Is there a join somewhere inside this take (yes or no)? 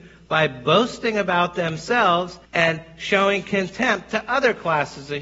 yes